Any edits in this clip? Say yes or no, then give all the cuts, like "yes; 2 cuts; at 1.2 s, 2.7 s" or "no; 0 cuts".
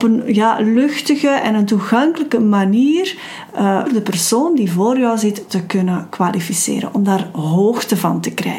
yes; 1 cut; at 3.9 s